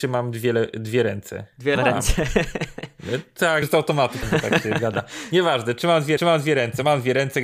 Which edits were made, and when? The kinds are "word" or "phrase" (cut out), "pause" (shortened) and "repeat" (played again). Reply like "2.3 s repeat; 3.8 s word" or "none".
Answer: 1.8 s word; 3.6 s word; 4.2 s word; 6.2 s repeat